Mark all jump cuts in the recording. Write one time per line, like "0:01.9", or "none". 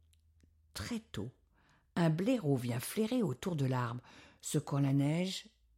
none